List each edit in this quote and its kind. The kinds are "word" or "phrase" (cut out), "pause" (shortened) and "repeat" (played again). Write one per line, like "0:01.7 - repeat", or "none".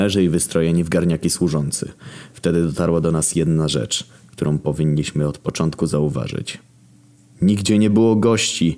none